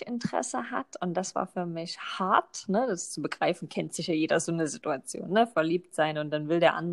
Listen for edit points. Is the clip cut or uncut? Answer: uncut